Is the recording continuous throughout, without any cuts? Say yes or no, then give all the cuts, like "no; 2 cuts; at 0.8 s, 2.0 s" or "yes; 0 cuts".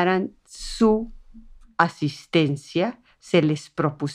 yes; 0 cuts